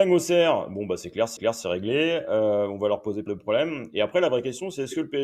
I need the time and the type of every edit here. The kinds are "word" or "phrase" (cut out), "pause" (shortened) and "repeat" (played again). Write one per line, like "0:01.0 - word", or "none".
0:01.4 - repeat
0:03.3 - word